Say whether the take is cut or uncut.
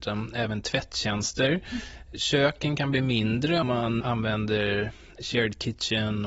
cut